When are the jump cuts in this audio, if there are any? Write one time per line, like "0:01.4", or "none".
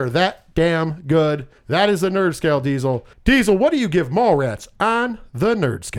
0:01.6
0:03.1

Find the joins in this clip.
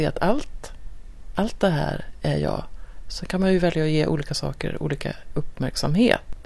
none

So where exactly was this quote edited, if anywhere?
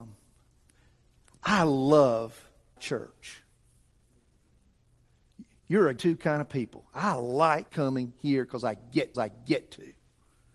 0:02.8
0:06.0
0:07.7
0:09.1

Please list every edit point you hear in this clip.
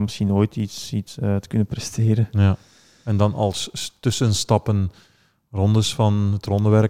none

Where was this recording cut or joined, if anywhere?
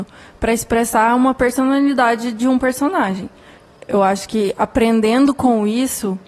none

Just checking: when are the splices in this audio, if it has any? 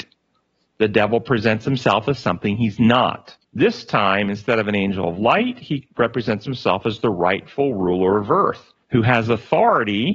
0:03.4
0:08.8

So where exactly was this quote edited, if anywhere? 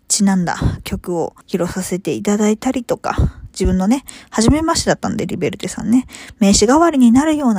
0:01.4

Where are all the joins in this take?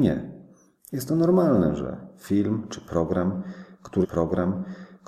0:04.0

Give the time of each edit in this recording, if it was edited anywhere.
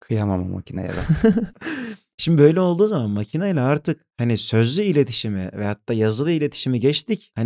none

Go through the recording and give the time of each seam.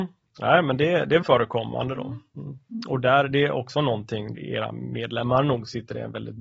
0:01.2
0:04.3

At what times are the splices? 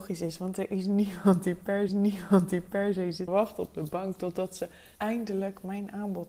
0:01.9
0:03.3
0:05.0

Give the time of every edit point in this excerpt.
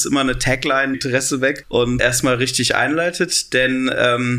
0:00.9
0:01.6
0:02.0

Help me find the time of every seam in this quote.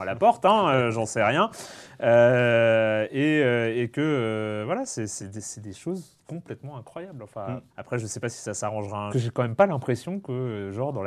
0:05.2
0:07.7
0:09.1

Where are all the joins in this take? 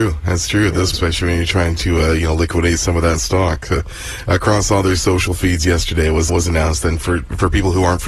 0:00.9
0:06.3

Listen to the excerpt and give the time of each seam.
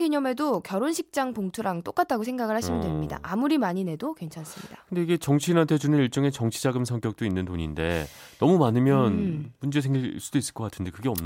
none

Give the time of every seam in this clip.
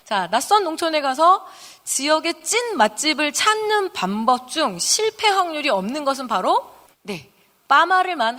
0:06.9

